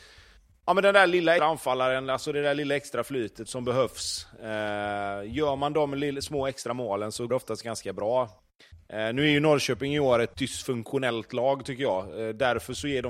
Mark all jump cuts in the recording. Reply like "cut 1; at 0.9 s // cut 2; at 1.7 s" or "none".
cut 1; at 1.4 s // cut 2; at 3.5 s // cut 3; at 7.3 s // cut 4; at 10.3 s